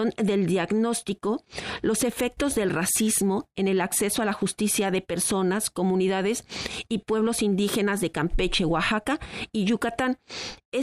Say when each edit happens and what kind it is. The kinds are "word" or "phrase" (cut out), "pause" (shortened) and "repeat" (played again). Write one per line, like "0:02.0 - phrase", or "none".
none